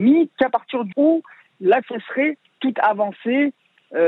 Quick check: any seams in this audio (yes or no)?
yes